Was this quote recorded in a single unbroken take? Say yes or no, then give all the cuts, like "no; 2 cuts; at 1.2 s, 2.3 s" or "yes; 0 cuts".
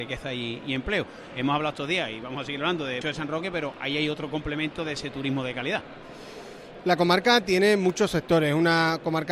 no; 1 cut; at 3.0 s